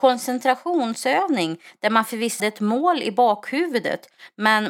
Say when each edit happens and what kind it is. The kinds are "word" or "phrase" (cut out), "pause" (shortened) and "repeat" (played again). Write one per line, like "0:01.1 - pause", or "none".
0:02.4 - word